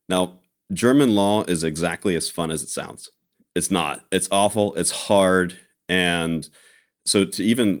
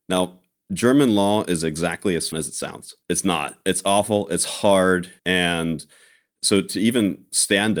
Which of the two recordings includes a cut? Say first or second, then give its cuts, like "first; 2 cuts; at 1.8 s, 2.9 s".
second; 3 cuts; at 2.3 s, 3.0 s, 5.2 s